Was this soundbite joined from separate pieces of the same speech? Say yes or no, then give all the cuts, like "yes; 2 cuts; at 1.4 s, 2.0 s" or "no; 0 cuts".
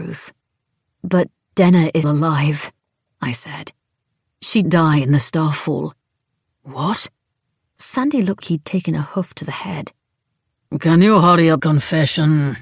yes; 4 cuts; at 2.0 s, 4.6 s, 8.4 s, 11.6 s